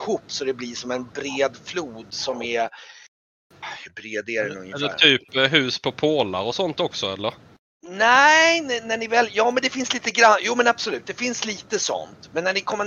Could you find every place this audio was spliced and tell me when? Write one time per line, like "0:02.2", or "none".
none